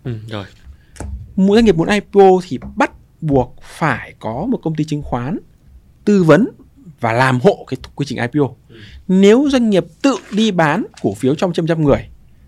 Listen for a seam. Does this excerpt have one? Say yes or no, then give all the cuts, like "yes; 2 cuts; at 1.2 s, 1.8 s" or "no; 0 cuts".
no; 0 cuts